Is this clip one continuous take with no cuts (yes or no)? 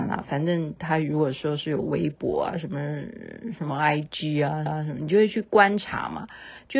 no